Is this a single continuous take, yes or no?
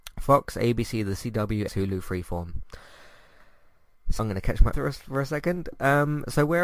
no